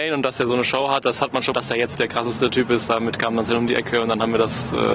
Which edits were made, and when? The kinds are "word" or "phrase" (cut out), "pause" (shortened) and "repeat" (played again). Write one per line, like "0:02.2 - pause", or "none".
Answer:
0:01.5 - phrase
0:01.9 - word